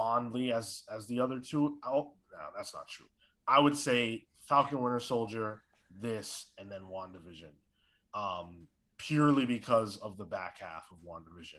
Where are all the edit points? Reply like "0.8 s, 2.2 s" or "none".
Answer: none